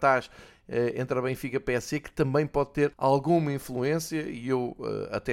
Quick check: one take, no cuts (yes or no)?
no